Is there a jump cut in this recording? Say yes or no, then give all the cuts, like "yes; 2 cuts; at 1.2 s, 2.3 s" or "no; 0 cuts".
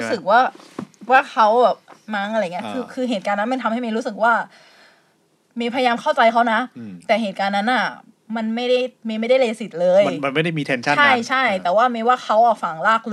no; 0 cuts